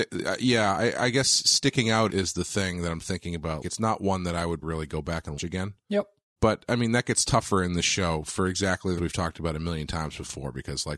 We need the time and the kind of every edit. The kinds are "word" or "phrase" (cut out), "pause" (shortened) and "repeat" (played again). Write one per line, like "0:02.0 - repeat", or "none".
0:02.1 - word
0:03.6 - word
0:04.6 - word
0:05.4 - word
0:06.4 - word
0:09.0 - word